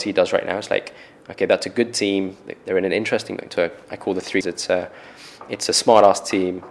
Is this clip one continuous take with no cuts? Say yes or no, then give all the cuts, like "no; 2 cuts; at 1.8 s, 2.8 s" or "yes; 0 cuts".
no; 1 cut; at 4.4 s